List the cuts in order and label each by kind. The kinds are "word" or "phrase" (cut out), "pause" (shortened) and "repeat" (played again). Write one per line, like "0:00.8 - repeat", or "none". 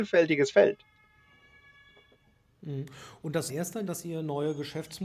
0:03.5 - phrase
0:03.9 - word